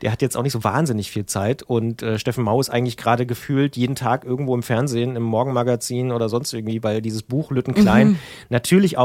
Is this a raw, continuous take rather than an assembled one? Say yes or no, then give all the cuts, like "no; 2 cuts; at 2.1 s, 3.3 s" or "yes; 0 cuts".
yes; 0 cuts